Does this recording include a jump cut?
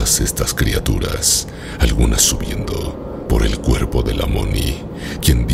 no; 0 cuts

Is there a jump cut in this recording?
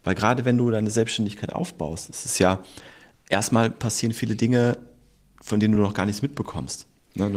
no; 0 cuts

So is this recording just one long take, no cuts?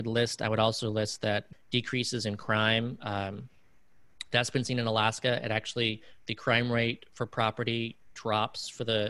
no; 1 cut; at 1.5 s

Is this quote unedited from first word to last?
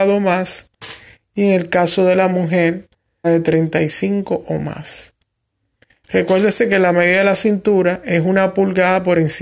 no; 1 cut; at 3.2 s

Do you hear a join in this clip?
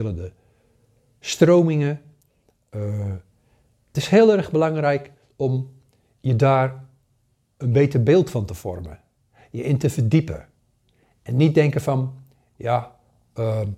no; 0 cuts

